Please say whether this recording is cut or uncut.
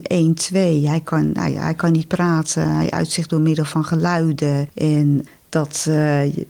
uncut